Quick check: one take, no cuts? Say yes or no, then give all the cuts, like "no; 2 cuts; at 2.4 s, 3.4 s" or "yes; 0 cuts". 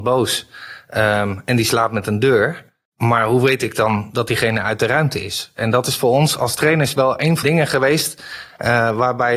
no; 1 cut; at 7.4 s